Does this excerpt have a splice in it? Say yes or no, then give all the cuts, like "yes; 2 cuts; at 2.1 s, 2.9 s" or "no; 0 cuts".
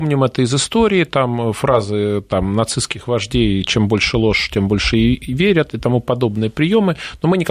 no; 0 cuts